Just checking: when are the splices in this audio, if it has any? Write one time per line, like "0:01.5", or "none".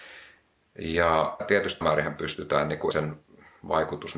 0:01.4
0:01.8
0:02.9